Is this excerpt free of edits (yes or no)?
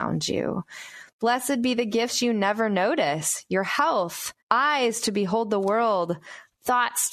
no